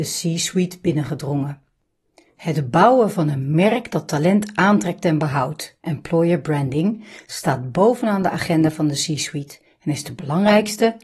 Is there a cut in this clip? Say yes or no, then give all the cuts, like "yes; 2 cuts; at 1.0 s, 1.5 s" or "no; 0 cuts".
no; 0 cuts